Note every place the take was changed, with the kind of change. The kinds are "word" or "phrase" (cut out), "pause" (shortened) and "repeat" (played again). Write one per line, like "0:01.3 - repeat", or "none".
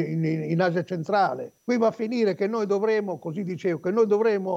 0:01.6 - pause